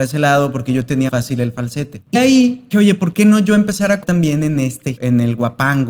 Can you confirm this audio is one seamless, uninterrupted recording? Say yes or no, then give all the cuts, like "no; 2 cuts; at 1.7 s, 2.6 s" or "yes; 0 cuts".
no; 5 cuts; at 1.1 s, 2.1 s, 2.7 s, 4.0 s, 5.0 s